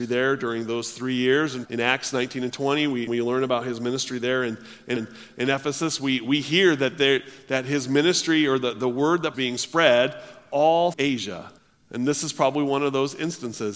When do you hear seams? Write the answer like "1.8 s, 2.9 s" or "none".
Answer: 1.6 s, 3.1 s, 5.0 s, 9.3 s, 10.9 s, 11.6 s